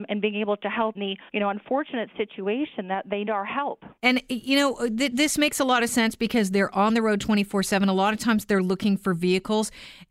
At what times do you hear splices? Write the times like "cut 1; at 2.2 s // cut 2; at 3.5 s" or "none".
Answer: cut 1; at 0.9 s // cut 2; at 1.3 s // cut 3; at 3.3 s // cut 4; at 4.0 s